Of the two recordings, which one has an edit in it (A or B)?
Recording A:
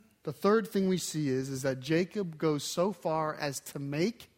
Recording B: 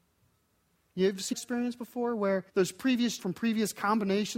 B